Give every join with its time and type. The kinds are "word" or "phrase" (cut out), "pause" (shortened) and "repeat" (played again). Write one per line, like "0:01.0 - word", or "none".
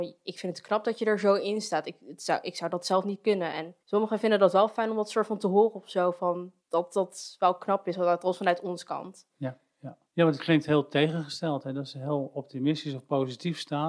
0:03.8 - pause
0:06.6 - pause
0:10.1 - pause